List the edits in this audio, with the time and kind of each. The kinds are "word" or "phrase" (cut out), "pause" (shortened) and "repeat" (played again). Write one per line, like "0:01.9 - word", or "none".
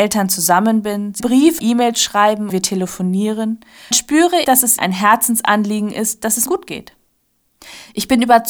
0:01.2 - word
0:01.6 - word
0:02.5 - word
0:03.9 - word
0:04.4 - word
0:04.8 - word
0:06.5 - word